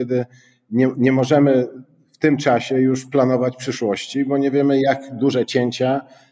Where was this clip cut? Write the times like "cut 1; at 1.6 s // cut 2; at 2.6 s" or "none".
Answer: none

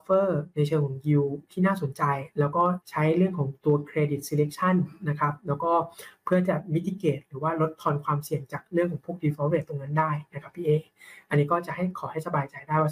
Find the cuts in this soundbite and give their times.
cut 1; at 2.8 s

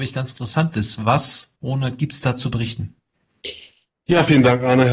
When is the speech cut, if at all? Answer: none

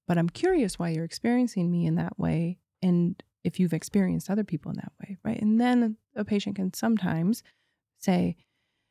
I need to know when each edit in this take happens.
none

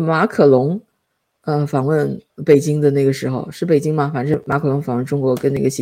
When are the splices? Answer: cut 1; at 2.3 s

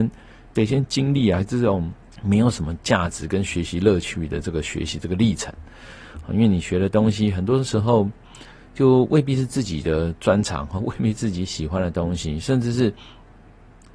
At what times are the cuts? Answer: cut 1; at 2.0 s

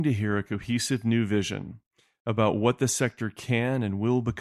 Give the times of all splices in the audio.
none

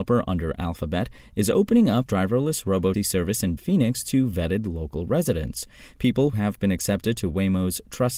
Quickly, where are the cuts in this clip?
cut 1; at 2.1 s // cut 2; at 2.9 s // cut 3; at 3.6 s // cut 4; at 6.3 s

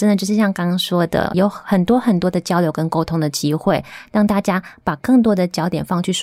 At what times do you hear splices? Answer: cut 1; at 1.3 s

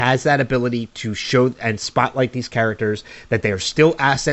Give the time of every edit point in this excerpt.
none

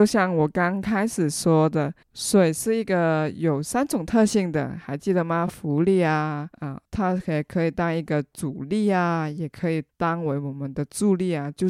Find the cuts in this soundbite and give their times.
cut 1; at 2.0 s // cut 2; at 6.5 s // cut 3; at 6.8 s // cut 4; at 9.9 s

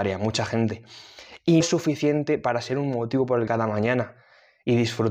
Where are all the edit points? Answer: cut 1; at 1.6 s // cut 2; at 3.5 s

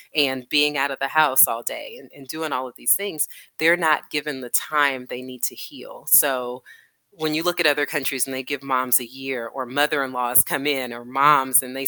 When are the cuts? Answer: none

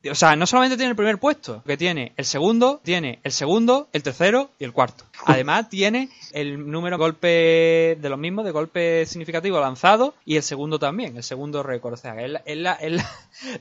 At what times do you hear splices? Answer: cut 1; at 1.7 s // cut 2; at 2.8 s // cut 3; at 5.1 s // cut 4; at 6.3 s // cut 5; at 7.0 s // cut 6; at 10.2 s

